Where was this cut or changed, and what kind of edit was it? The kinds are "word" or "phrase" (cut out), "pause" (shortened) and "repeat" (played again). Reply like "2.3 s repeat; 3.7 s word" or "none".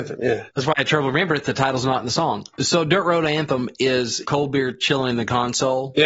2.5 s pause